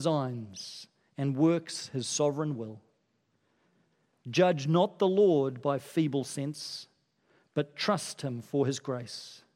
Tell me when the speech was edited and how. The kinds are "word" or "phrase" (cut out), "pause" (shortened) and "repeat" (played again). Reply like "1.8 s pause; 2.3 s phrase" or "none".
none